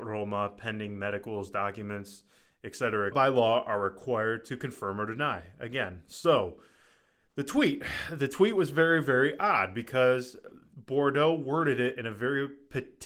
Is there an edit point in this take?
yes; 1 cut; at 3.1 s

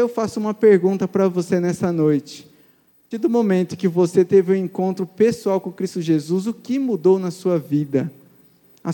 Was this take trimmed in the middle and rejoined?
yes; 1 cut; at 3.1 s

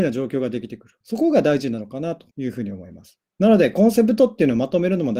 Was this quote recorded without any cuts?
no; 3 cuts; at 1.0 s, 2.3 s, 3.3 s

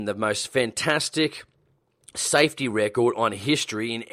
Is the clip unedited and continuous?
yes; 0 cuts

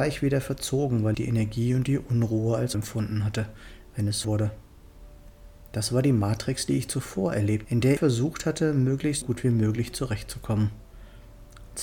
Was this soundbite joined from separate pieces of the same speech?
yes; 6 cuts; at 1.1 s, 2.7 s, 4.2 s, 7.6 s, 8.0 s, 9.2 s

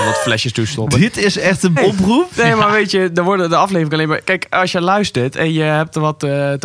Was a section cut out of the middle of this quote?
yes; 1 cut; at 1.8 s

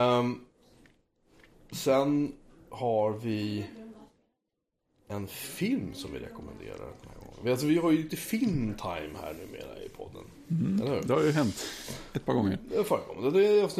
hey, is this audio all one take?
yes; 0 cuts

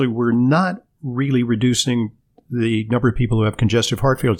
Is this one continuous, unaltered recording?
yes; 0 cuts

